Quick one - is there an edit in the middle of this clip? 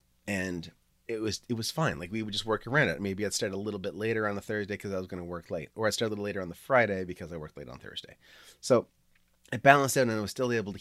no; 0 cuts

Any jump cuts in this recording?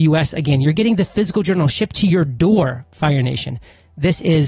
no; 0 cuts

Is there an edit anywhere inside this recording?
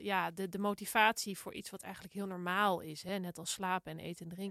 no; 0 cuts

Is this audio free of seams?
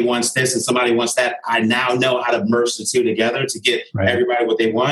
yes; 0 cuts

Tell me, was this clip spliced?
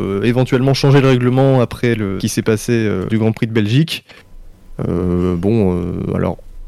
yes; 2 cuts; at 2.2 s, 3.1 s

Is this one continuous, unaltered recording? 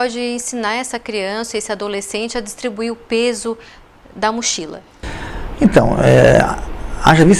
yes; 0 cuts

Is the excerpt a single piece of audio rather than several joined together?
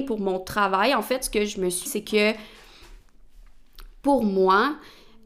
no; 1 cut; at 1.9 s

